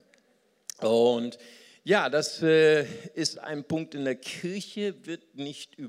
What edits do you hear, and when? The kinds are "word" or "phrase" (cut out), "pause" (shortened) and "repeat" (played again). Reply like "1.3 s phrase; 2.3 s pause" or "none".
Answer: none